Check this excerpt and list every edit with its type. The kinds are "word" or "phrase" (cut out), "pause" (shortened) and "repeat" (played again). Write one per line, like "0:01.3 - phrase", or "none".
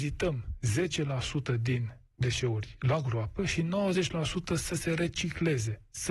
none